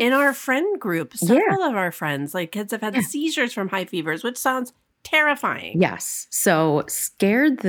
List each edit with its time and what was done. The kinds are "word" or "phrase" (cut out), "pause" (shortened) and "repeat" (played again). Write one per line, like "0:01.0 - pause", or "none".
none